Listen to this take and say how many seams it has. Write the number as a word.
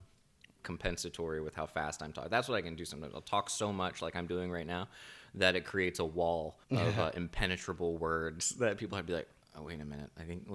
one